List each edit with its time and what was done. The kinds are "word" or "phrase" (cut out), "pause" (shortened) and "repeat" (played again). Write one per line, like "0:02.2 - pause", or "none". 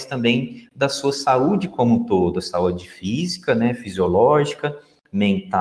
none